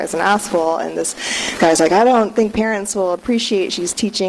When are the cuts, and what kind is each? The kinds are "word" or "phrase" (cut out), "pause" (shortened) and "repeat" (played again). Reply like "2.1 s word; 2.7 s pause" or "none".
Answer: 1.6 s word